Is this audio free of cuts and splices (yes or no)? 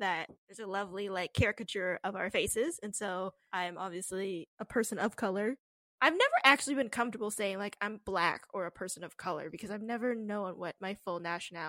yes